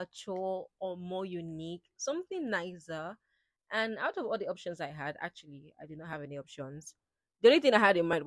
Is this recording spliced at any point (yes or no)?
no